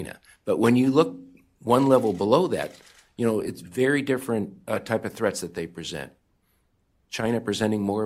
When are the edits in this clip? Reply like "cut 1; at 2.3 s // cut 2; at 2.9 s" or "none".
none